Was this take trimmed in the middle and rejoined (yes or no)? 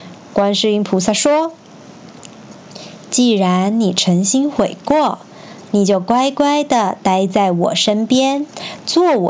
yes